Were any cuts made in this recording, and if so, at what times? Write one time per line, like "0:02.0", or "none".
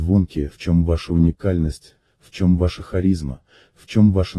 none

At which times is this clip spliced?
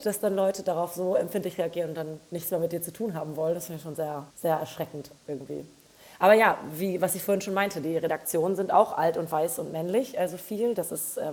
0:04.3
0:05.2

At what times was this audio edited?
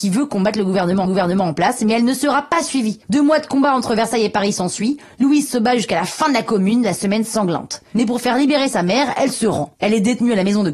0:01.0
0:03.0
0:09.7

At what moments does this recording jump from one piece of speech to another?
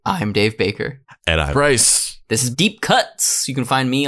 0:01.5
0:02.5

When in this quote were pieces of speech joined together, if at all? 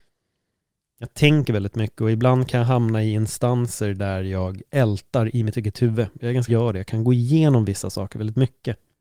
0:06.5

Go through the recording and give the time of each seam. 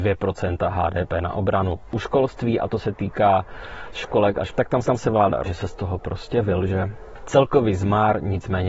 0:03.9
0:04.5
0:04.8
0:05.4

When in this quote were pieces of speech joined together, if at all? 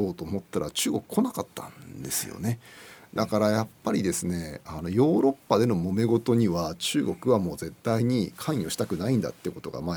none

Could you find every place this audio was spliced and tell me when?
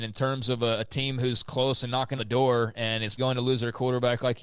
0:02.2
0:03.2

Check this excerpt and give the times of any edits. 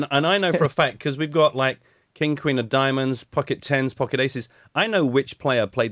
none

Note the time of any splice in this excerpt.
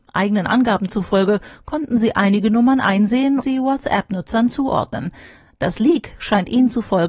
0:03.4

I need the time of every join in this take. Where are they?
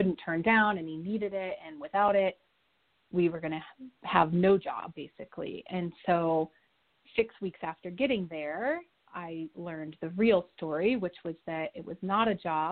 none

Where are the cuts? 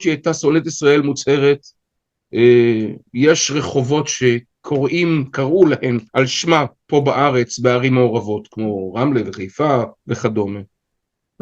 0:06.1
0:10.0

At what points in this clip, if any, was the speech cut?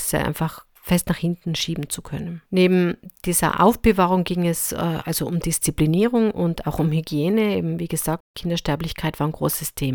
0:02.5

